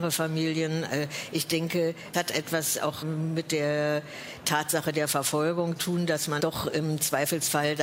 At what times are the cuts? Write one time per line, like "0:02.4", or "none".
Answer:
0:02.1
0:03.0
0:05.8
0:06.4